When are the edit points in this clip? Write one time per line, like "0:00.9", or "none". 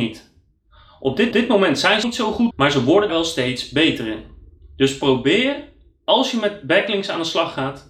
0:01.3
0:02.0
0:02.5
0:03.1